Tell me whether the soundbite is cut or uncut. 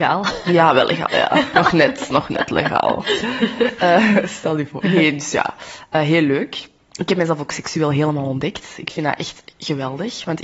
uncut